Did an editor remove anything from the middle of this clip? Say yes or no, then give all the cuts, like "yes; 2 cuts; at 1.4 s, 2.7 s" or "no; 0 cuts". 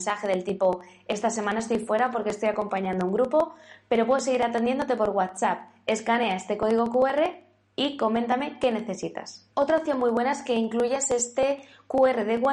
no; 0 cuts